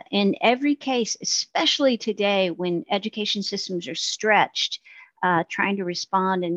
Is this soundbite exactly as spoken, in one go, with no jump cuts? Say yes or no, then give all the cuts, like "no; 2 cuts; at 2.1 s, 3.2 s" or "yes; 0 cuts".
no; 1 cut; at 3.9 s